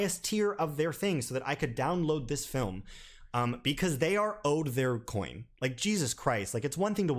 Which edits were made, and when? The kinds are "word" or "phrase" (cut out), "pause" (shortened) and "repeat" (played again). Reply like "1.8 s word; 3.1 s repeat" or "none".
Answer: 5.5 s pause